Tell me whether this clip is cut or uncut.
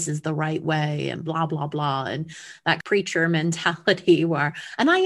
uncut